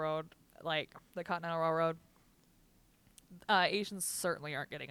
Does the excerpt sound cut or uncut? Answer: uncut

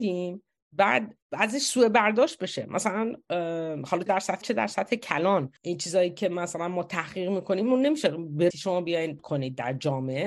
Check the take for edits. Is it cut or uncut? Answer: cut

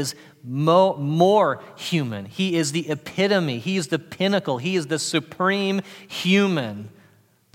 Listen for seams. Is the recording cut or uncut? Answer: uncut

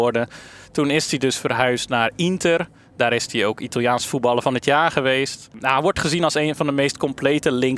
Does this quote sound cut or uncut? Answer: uncut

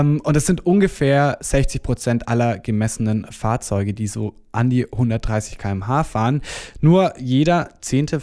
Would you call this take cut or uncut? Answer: uncut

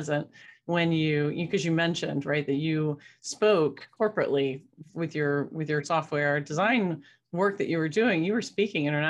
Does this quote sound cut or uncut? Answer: uncut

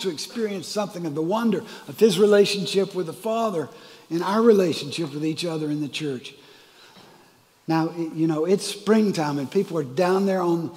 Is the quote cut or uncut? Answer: uncut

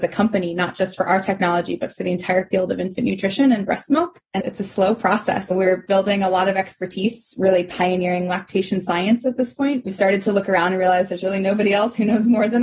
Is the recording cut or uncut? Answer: uncut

